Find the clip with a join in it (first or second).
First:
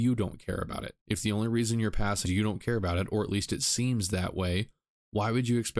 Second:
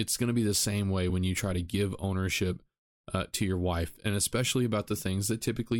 first